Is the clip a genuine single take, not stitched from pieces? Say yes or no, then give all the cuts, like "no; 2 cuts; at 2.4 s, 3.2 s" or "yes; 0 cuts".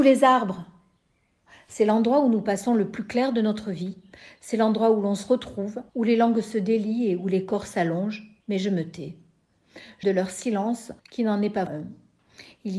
no; 5 cuts; at 5.9 s, 8.4 s, 10.0 s, 11.0 s, 11.7 s